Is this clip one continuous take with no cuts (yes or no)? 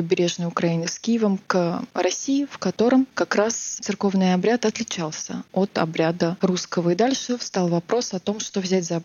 yes